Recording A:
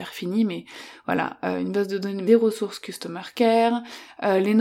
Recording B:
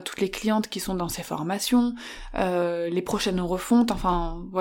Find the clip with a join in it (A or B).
A